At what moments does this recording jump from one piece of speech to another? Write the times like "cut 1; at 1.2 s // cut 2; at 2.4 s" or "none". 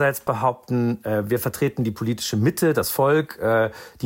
none